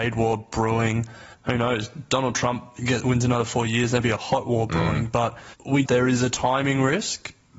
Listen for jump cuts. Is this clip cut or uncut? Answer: cut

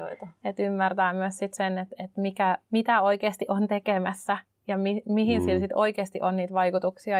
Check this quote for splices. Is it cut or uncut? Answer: cut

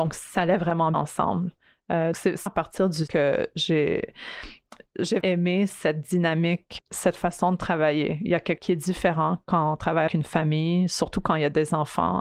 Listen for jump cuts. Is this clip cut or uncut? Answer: cut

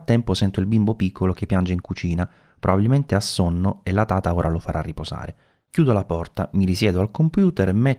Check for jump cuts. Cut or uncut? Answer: uncut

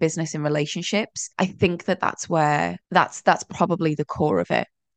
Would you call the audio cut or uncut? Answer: cut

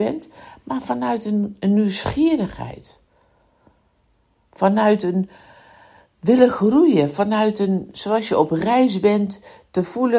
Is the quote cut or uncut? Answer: uncut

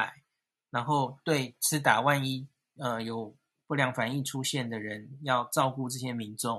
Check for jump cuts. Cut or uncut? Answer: uncut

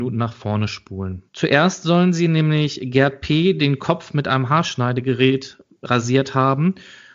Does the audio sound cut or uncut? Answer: cut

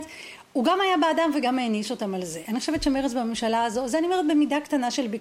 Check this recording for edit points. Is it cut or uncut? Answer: uncut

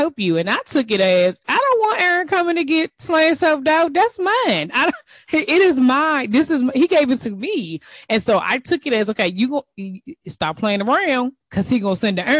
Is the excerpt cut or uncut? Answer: uncut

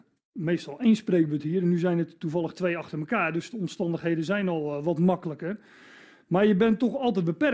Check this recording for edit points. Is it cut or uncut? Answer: uncut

